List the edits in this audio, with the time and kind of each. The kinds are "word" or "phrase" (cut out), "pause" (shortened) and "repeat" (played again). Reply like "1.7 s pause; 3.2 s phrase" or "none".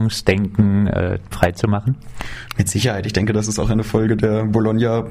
1.3 s word